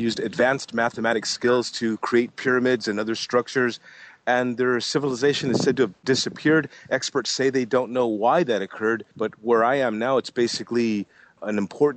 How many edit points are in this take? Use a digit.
1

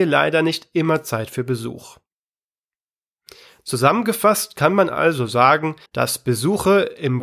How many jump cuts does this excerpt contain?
1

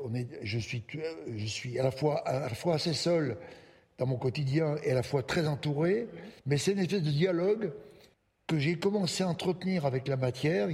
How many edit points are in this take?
2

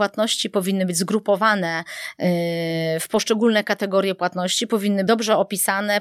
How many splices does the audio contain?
1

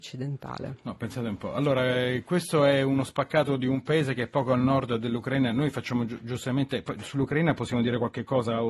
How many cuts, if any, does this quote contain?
0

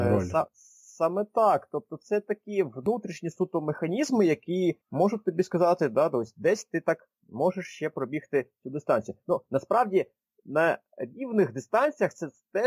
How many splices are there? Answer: 2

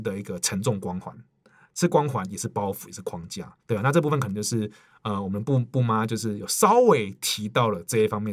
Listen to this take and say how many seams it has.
1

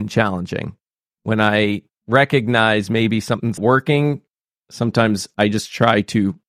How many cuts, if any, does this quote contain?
1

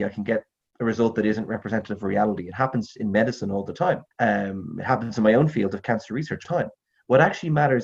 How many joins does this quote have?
2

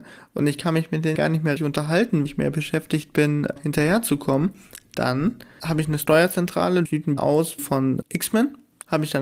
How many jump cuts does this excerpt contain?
6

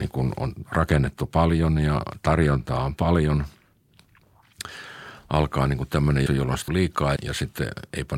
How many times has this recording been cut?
3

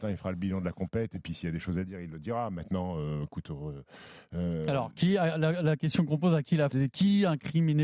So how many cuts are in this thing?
1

